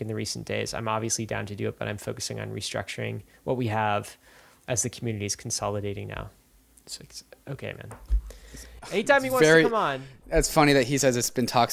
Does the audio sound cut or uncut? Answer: uncut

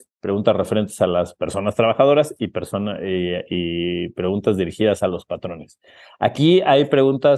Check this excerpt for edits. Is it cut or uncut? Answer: uncut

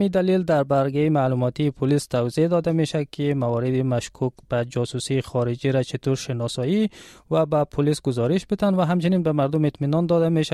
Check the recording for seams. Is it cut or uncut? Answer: uncut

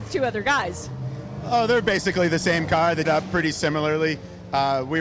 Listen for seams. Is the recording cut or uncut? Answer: cut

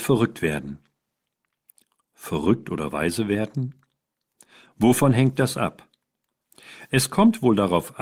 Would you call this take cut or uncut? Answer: uncut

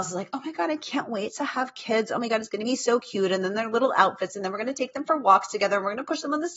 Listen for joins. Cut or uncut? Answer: uncut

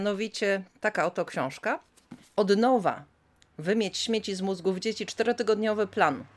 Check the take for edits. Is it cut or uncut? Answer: cut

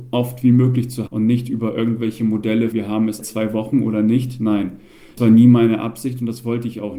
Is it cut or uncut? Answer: cut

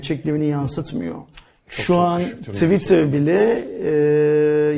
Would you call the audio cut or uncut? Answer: uncut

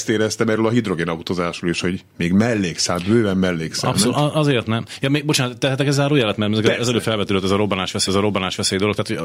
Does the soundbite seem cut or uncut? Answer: cut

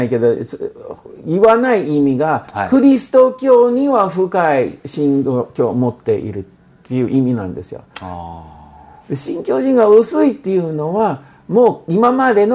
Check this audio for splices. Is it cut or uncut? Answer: uncut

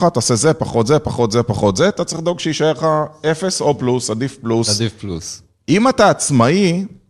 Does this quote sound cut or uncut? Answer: uncut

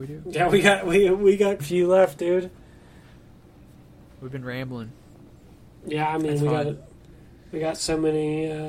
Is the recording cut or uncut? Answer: cut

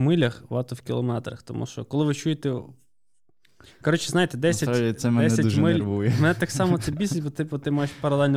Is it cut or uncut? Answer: uncut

